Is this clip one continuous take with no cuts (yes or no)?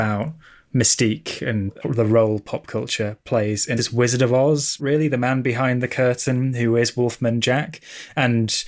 no